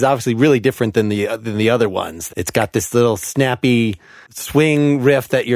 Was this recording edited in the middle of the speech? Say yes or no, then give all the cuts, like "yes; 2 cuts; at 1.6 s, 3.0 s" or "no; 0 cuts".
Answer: yes; 1 cut; at 2.3 s